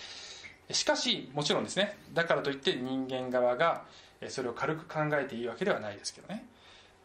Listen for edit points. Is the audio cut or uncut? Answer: uncut